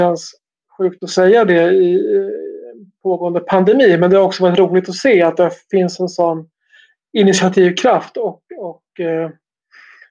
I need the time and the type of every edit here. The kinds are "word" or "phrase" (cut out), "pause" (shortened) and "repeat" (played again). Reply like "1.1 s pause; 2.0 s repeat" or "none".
none